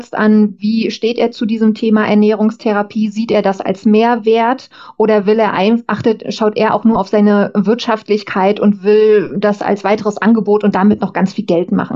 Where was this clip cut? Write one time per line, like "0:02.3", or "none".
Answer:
none